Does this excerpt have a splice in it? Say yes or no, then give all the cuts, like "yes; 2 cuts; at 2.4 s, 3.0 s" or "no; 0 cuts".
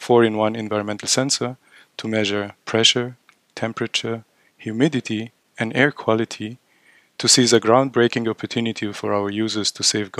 no; 0 cuts